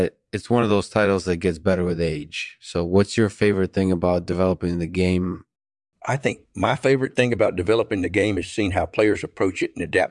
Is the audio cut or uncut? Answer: uncut